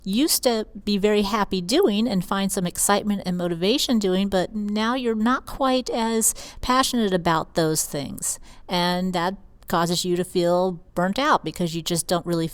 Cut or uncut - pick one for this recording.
cut